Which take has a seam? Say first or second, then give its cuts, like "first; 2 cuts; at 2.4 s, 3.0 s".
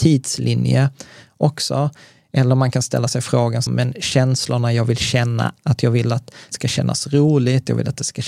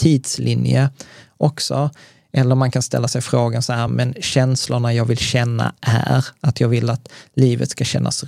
first; 3 cuts; at 3.7 s, 5.6 s, 6.5 s